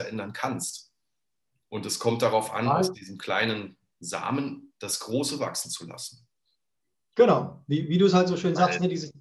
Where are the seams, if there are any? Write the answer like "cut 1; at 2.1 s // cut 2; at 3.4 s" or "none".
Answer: none

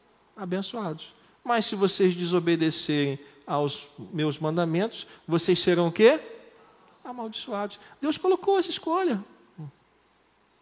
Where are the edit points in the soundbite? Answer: none

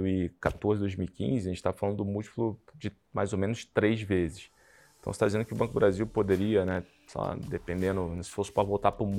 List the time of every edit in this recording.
none

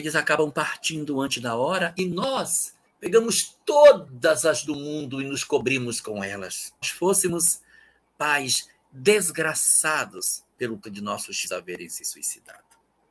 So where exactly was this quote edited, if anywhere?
cut 1; at 2.8 s // cut 2; at 4.6 s // cut 3; at 6.8 s // cut 4; at 10.8 s // cut 5; at 11.4 s

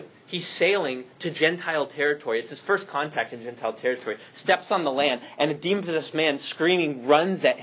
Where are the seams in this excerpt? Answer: none

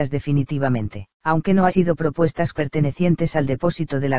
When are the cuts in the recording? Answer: cut 1; at 1.1 s // cut 2; at 1.7 s // cut 3; at 2.5 s

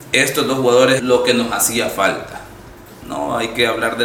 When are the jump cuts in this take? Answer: cut 1; at 1.0 s

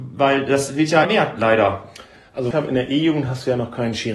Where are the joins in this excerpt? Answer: cut 1; at 1.0 s // cut 2; at 2.5 s

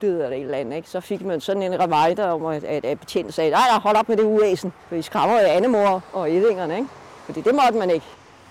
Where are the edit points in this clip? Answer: cut 1; at 4.8 s

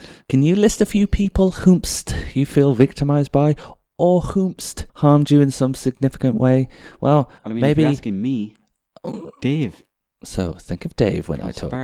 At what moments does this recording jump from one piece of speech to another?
cut 1; at 4.9 s // cut 2; at 7.4 s // cut 3; at 10.0 s

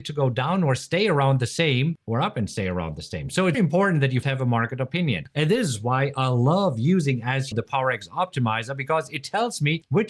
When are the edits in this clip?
cut 1; at 3.5 s // cut 2; at 4.2 s // cut 3; at 7.5 s

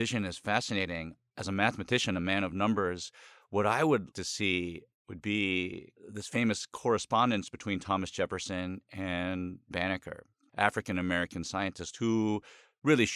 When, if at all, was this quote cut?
cut 1; at 4.1 s // cut 2; at 9.7 s // cut 3; at 10.5 s

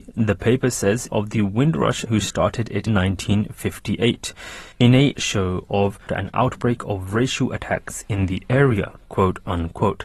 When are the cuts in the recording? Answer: cut 1; at 1.1 s // cut 2; at 2.1 s // cut 3; at 2.9 s // cut 4; at 4.7 s // cut 5; at 5.1 s // cut 6; at 6.1 s

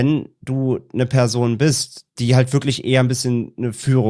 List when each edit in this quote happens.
cut 1; at 2.1 s

